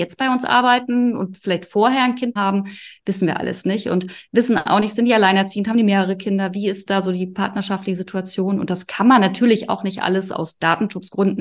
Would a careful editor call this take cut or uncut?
cut